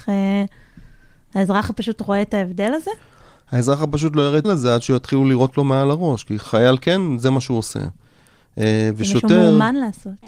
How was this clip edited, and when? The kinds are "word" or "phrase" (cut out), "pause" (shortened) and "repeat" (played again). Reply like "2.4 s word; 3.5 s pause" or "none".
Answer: 4.4 s word; 6.4 s word